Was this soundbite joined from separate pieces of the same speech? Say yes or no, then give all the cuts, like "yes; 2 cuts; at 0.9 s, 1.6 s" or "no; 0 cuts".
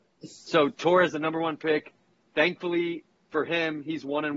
no; 0 cuts